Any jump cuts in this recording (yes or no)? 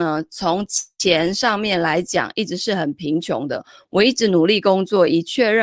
no